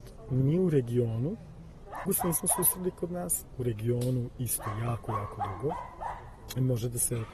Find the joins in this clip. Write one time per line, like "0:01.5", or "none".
0:02.1

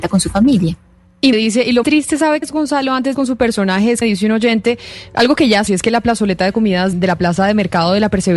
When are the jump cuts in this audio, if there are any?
0:01.3
0:01.8
0:02.4
0:03.1
0:04.0
0:05.7
0:06.9

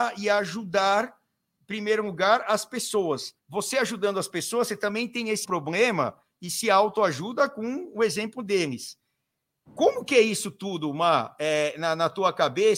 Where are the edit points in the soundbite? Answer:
0:03.4
0:05.4

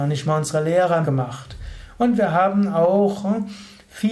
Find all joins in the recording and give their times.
0:01.0

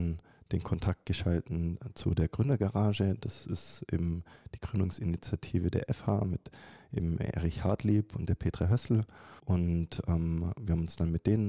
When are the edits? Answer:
0:09.4

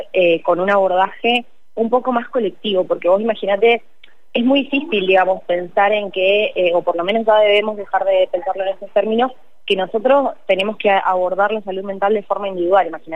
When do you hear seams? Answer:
none

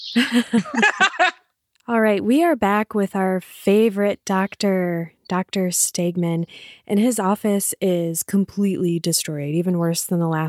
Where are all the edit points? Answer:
none

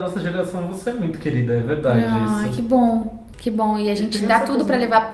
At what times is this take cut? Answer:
none

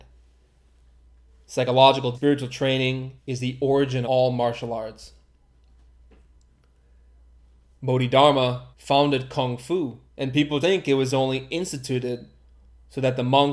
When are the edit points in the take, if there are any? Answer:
0:02.1
0:03.2
0:04.0
0:08.7
0:10.1
0:10.6

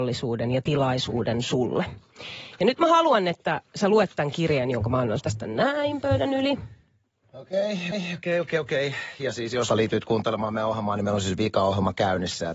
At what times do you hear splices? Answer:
0:05.2
0:07.9
0:09.7

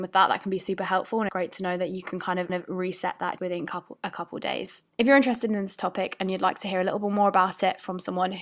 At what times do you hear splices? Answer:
0:01.3
0:02.5
0:03.4
0:04.9

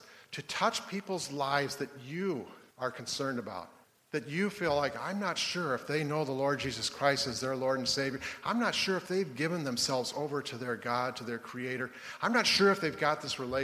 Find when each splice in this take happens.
0:02.7
0:03.8

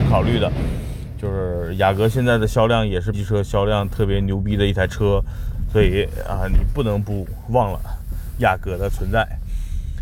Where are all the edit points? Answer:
0:03.1

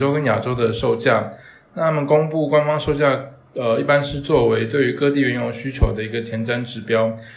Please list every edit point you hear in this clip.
none

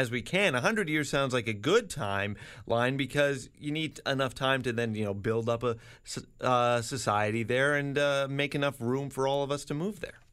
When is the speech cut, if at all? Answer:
none

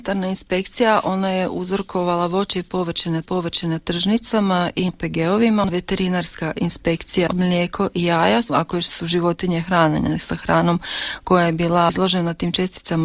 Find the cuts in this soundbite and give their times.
0:03.2
0:04.9

